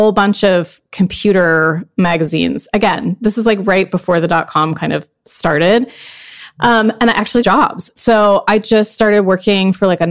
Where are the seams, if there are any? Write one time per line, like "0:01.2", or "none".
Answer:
0:07.4